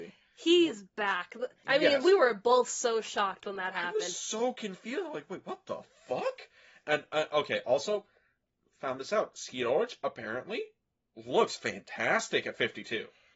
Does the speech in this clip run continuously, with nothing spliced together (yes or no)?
yes